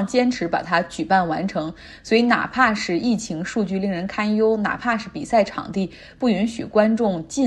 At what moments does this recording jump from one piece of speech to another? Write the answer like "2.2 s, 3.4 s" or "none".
none